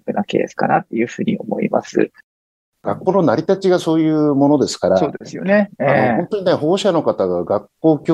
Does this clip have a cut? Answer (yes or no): no